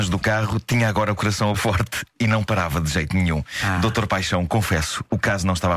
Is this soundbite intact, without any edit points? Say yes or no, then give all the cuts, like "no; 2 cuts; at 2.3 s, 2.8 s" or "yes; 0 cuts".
no; 1 cut; at 1.5 s